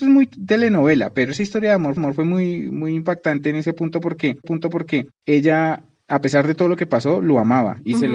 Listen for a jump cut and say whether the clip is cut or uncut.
cut